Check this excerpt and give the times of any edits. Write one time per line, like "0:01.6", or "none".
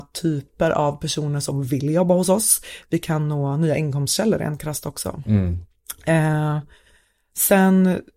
none